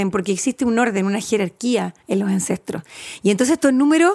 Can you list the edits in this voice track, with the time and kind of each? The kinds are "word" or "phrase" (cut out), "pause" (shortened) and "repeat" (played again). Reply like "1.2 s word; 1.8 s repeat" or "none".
2.0 s pause